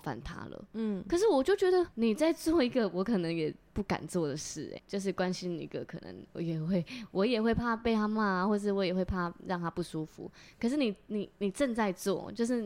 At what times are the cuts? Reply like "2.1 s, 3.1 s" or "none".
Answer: 1.9 s, 4.8 s